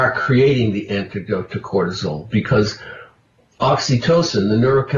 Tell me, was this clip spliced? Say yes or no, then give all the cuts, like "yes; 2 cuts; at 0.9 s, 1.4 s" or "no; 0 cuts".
no; 0 cuts